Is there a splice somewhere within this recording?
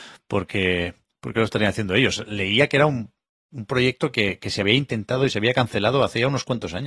no; 0 cuts

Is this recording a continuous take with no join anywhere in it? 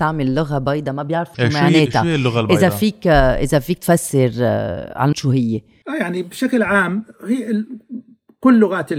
no; 2 cuts; at 1.3 s, 5.1 s

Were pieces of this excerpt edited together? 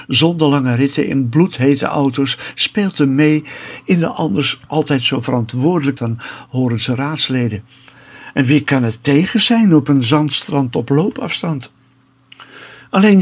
yes; 1 cut; at 6.0 s

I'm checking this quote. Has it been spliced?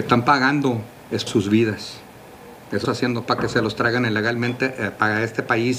yes; 3 cuts; at 1.3 s, 2.8 s, 3.3 s

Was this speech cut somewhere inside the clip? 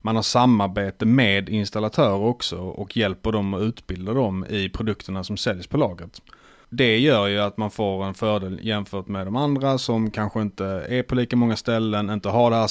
no; 0 cuts

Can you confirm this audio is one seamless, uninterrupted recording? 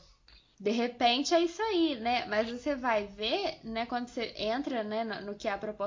yes; 0 cuts

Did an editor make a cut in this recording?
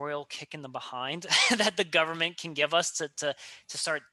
no; 0 cuts

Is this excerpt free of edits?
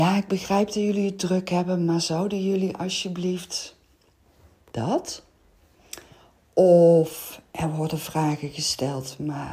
yes; 0 cuts

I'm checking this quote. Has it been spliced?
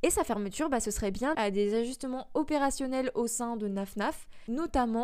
yes; 1 cut; at 1.3 s

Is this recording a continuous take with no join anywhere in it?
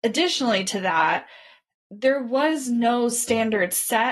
yes; 0 cuts

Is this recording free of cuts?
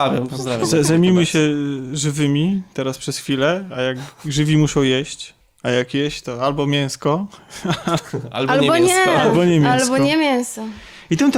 no; 1 cut; at 5.4 s

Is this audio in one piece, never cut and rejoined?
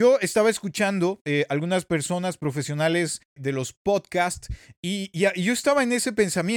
no; 1 cut; at 3.4 s

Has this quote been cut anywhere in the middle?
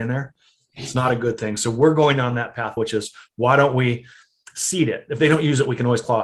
yes; 1 cut; at 2.8 s

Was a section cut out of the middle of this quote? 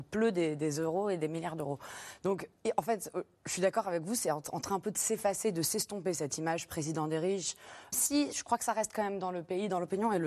yes; 1 cut; at 7.9 s

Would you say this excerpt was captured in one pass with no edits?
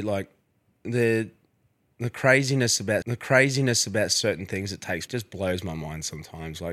no; 2 cuts; at 3.0 s, 5.1 s

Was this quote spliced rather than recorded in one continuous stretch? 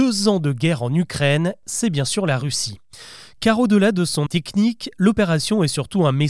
yes; 1 cut; at 4.3 s

